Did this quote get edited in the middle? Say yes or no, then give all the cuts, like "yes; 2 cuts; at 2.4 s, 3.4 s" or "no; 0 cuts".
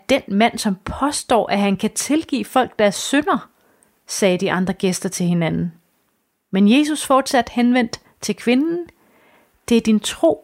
no; 0 cuts